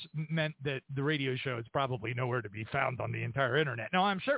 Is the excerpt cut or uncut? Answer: uncut